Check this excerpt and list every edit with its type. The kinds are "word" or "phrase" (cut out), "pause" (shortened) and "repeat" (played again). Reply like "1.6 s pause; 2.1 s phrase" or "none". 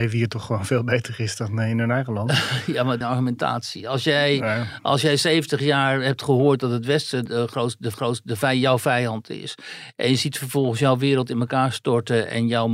3.0 s phrase; 7.3 s word; 7.9 s repeat